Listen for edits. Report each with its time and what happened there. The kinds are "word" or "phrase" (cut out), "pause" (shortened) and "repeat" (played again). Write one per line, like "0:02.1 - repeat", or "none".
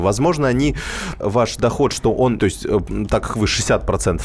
0:01.2 - word
0:02.4 - phrase